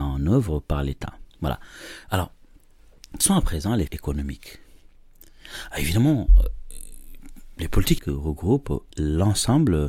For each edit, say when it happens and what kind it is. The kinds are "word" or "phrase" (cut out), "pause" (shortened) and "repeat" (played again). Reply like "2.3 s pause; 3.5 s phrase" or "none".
1.3 s pause; 3.2 s word; 3.9 s phrase; 8.0 s word; 8.9 s pause